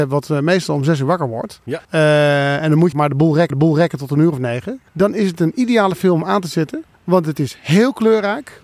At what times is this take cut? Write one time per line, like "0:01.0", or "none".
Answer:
0:01.8
0:02.9
0:03.5
0:04.9
0:06.9